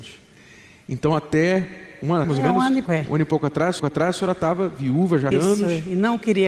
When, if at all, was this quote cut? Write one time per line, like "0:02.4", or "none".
0:02.2
0:02.9
0:03.8
0:05.3